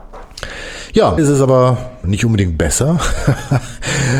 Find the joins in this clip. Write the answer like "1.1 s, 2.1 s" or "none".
1.2 s, 2.0 s